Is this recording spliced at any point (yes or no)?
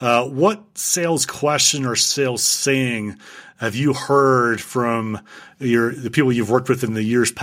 no